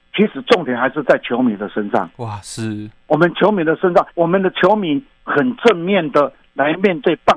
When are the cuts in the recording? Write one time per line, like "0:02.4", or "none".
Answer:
0:04.1